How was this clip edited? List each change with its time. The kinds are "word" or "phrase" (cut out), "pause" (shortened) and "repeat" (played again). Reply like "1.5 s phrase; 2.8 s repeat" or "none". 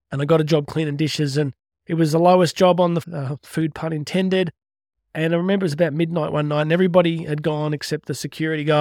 1.7 s pause; 3.0 s phrase